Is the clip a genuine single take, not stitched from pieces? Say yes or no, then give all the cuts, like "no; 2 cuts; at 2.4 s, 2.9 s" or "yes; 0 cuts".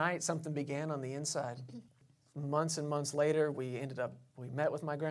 no; 1 cut; at 1.9 s